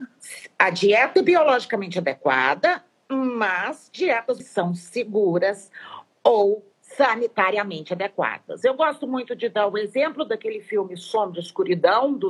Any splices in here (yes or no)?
yes